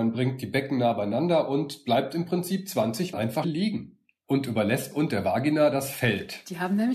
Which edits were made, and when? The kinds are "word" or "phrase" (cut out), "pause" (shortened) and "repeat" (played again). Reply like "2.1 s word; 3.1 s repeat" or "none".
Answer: 3.1 s word; 3.4 s word; 4.9 s phrase